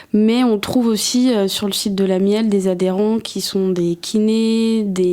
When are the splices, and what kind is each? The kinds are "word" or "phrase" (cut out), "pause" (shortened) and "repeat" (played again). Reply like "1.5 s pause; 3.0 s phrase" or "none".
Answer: none